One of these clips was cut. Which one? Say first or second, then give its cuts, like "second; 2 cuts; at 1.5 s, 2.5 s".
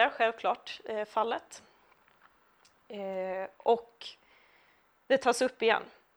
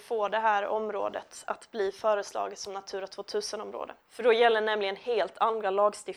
second; 1 cut; at 4.0 s